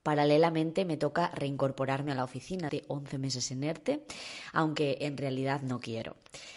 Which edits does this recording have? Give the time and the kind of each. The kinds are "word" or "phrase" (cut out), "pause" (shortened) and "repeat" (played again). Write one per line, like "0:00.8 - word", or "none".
0:02.7 - word

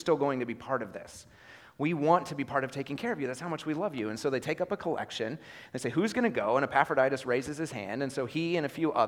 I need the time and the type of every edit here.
none

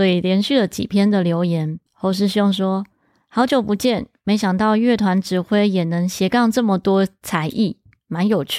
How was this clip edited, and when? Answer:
0:01.9 - pause

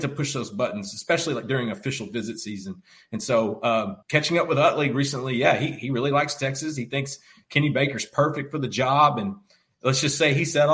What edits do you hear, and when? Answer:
0:04.0 - pause

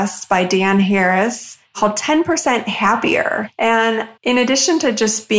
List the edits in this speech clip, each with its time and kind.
0:04.2 - pause

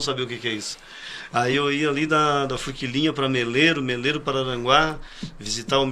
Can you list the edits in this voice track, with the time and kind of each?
none

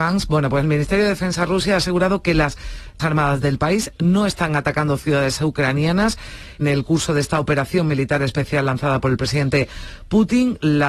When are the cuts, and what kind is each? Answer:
0:03.0 - word
0:06.6 - word

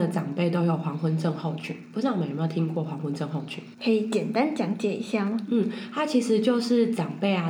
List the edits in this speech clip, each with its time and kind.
0:03.7 - pause

